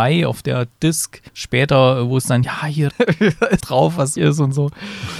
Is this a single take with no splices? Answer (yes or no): no